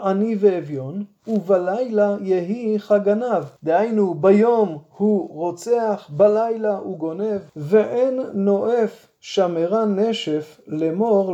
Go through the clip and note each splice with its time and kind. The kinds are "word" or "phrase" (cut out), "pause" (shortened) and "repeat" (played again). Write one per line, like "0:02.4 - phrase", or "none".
0:03.6 - pause
0:07.5 - pause